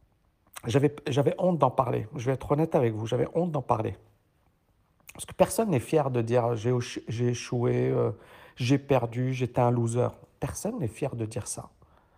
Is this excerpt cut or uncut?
uncut